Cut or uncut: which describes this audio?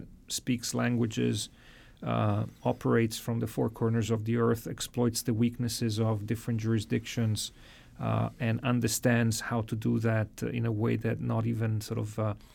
uncut